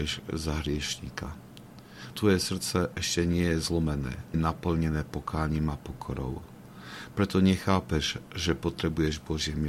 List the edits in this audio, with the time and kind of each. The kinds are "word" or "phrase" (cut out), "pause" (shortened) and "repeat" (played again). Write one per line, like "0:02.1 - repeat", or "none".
0:02.1 - word
0:04.3 - word